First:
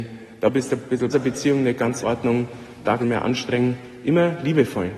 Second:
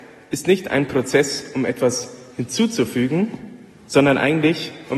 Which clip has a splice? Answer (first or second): first